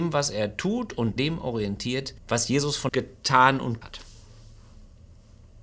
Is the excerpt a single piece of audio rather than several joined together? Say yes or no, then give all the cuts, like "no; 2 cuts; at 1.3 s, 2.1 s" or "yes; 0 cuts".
no; 4 cuts; at 1.2 s, 2.2 s, 2.9 s, 3.8 s